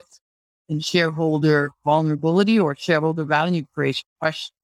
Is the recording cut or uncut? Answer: uncut